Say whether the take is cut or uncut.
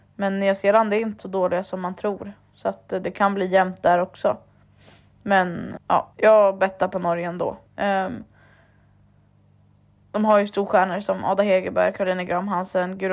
cut